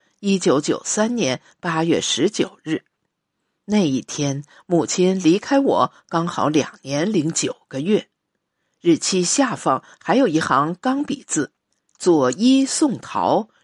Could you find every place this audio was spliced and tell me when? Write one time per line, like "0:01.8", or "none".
0:11.6

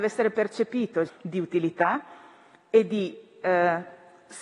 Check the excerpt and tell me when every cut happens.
0:01.1

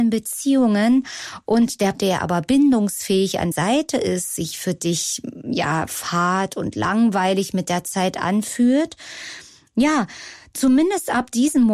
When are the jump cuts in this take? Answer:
0:01.9
0:03.5

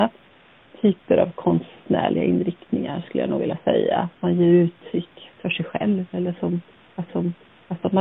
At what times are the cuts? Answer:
0:07.1

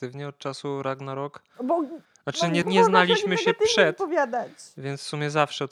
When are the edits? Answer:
0:02.6

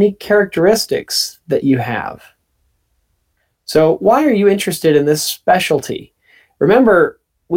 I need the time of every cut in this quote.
none

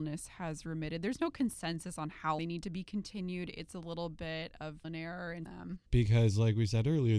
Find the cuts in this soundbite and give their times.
0:02.4
0:04.8
0:05.5
0:05.9

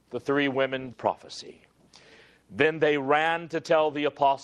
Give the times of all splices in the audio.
0:00.9

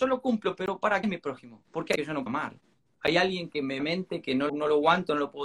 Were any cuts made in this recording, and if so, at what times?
0:01.0
0:02.0
0:02.3
0:03.8
0:04.5

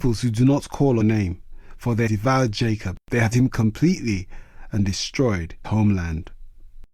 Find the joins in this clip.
0:01.0
0:02.1
0:03.3
0:05.6

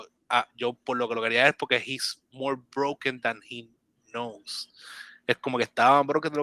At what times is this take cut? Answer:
none

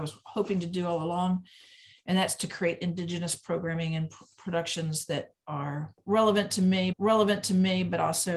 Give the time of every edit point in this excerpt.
0:06.9

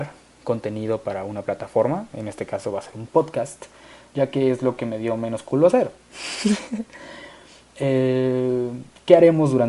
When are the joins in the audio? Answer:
none

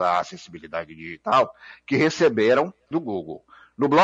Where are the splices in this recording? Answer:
0:02.9

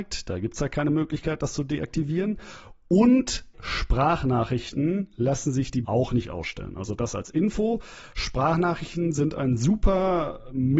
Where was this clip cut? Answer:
0:03.5
0:05.8

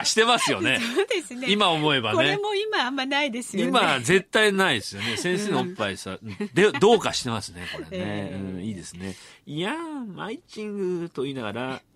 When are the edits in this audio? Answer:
none

